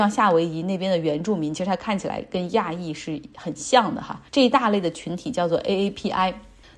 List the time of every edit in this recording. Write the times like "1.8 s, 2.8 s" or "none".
4.3 s